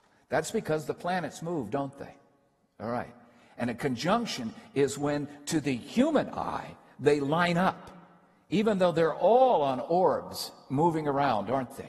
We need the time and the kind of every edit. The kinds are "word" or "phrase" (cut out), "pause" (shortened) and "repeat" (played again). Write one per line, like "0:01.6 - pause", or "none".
none